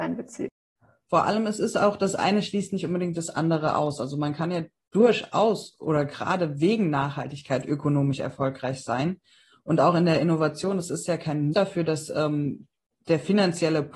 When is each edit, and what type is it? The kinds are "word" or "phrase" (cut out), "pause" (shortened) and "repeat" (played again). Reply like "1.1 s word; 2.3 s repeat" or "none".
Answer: 11.5 s word

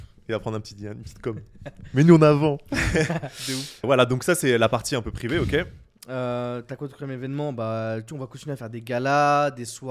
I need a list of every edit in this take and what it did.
3.8 s word

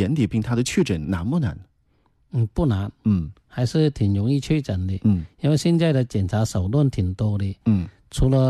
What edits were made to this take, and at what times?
none

